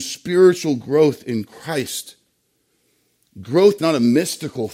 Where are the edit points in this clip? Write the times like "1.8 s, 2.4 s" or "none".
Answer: 3.8 s

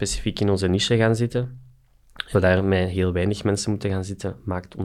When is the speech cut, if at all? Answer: 2.3 s

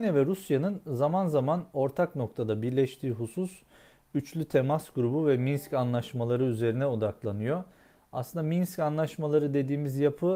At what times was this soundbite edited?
none

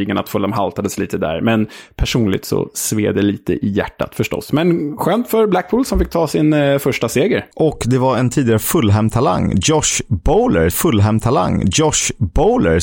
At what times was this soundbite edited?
7.5 s, 10.7 s

